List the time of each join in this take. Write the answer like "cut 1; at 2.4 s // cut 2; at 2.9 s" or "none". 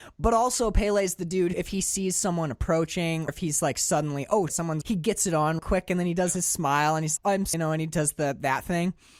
cut 1; at 1.5 s // cut 2; at 3.3 s // cut 3; at 4.5 s // cut 4; at 4.8 s // cut 5; at 5.6 s // cut 6; at 7.2 s // cut 7; at 7.5 s